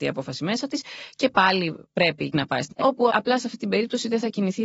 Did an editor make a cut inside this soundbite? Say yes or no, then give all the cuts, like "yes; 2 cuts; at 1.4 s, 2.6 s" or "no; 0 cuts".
yes; 4 cuts; at 1.8 s, 2.3 s, 2.7 s, 3.1 s